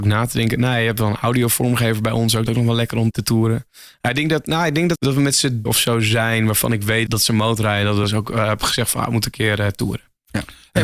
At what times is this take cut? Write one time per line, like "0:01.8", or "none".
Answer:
0:02.5
0:03.1
0:04.9
0:05.7
0:07.1
0:08.0